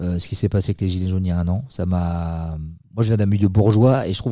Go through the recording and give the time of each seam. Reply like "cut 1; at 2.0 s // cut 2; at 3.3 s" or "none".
cut 1; at 2.8 s